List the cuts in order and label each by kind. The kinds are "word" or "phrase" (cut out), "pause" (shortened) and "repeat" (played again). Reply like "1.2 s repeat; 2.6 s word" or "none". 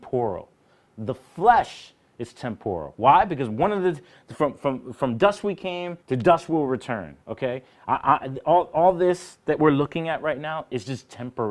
6.0 s pause